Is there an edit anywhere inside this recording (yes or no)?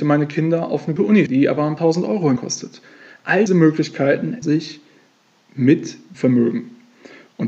yes